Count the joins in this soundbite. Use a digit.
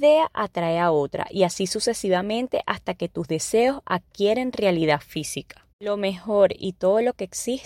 1